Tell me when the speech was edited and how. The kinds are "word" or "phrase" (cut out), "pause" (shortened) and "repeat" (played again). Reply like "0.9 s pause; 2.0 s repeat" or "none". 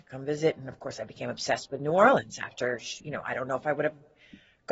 none